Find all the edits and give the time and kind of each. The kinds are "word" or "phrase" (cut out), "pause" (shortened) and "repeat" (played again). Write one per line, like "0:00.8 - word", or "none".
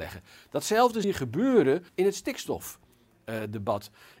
0:01.0 - word
0:01.9 - pause